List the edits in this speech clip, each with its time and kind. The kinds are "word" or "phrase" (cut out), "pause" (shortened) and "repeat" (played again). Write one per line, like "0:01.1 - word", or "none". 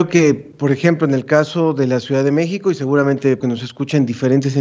0:03.4 - word